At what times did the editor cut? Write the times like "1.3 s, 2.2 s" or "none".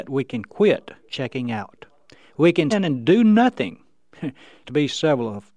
1.1 s, 2.7 s, 4.6 s